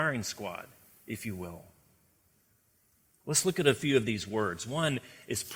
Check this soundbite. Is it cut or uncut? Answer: uncut